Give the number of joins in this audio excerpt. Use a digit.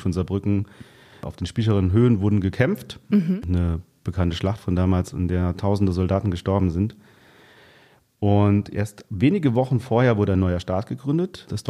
0